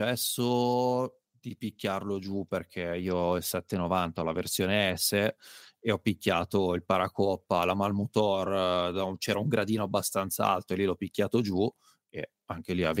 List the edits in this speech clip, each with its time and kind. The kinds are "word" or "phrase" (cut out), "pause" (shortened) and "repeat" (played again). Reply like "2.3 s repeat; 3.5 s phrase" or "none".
none